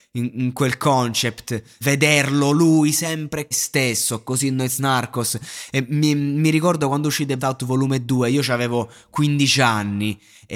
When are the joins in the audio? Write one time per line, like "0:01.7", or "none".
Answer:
0:01.8
0:03.5
0:07.4